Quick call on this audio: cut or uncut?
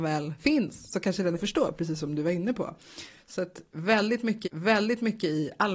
cut